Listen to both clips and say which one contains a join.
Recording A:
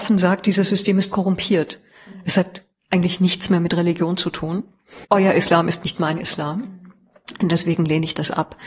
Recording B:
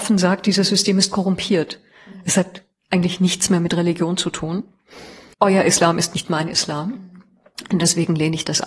A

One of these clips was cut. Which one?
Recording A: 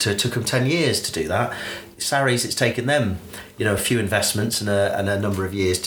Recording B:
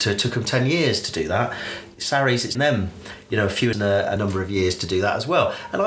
B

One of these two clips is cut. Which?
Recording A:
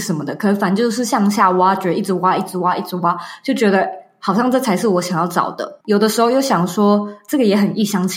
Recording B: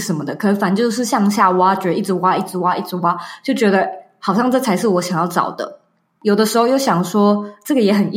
A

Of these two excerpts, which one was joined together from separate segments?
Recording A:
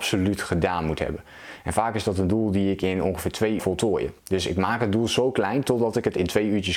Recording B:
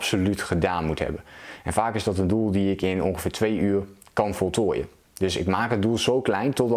A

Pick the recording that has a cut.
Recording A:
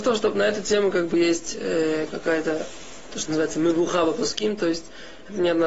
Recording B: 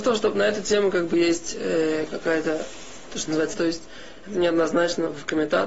B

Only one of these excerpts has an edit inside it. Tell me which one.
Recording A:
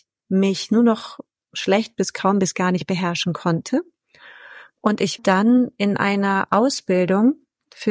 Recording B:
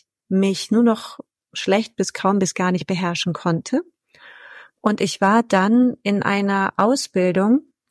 A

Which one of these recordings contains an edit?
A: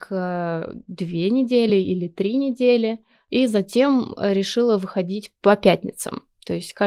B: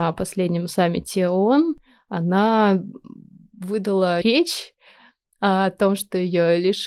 B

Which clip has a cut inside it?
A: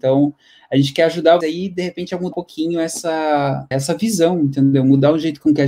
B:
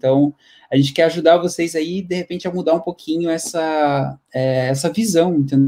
A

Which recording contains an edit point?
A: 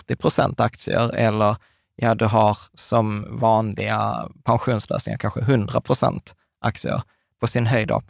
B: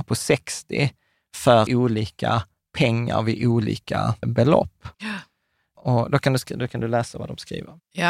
B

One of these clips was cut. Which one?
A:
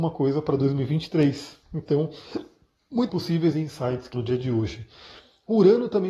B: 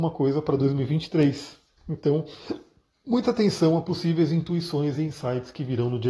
A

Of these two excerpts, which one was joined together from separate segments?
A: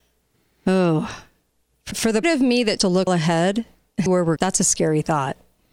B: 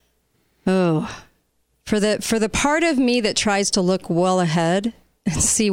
A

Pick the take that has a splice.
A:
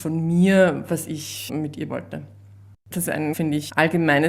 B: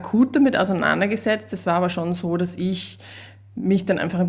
A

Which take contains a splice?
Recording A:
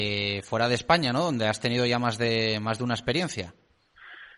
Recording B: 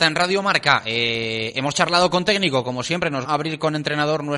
B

